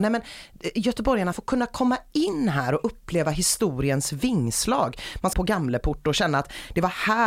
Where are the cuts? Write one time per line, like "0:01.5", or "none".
0:01.3
0:05.3